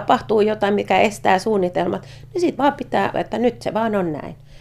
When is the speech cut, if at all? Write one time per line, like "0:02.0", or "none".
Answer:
0:02.6
0:03.1